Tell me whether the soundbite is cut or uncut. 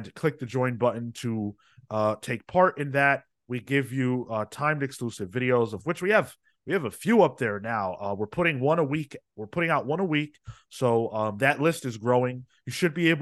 uncut